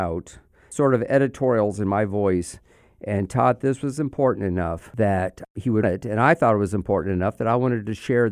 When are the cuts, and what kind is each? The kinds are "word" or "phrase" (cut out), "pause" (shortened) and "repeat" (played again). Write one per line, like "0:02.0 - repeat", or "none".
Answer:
0:03.6 - word
0:05.8 - word